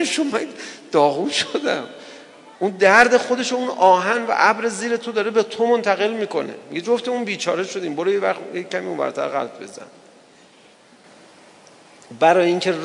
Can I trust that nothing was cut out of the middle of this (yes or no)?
no